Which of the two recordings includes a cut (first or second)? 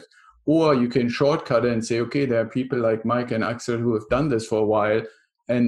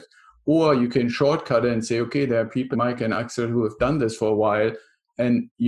second